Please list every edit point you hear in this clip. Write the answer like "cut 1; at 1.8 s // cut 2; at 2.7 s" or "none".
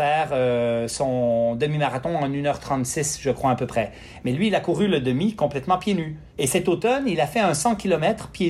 cut 1; at 6.3 s